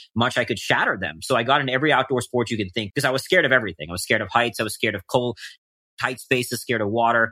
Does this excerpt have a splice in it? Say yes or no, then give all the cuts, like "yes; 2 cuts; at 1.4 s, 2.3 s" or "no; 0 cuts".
yes; 1 cut; at 2.9 s